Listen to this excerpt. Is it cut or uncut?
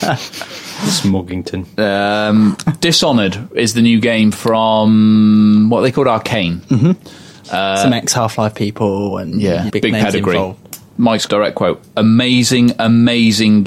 cut